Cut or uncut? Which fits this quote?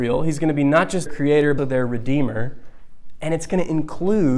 cut